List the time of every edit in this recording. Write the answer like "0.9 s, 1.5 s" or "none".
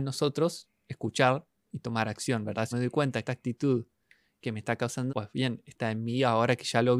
2.7 s, 3.2 s, 5.1 s